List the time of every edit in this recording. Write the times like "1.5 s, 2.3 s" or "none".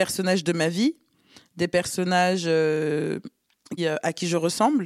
3.8 s